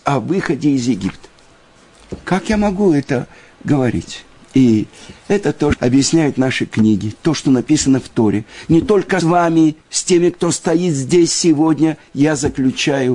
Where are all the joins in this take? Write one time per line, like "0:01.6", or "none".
0:05.7
0:09.2
0:09.8